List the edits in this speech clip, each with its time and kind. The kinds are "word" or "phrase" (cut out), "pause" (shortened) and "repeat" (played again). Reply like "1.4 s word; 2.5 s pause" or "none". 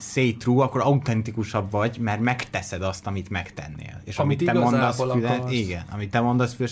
none